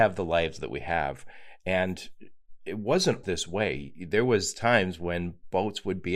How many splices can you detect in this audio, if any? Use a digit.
1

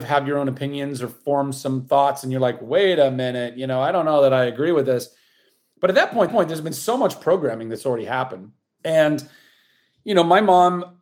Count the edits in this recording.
1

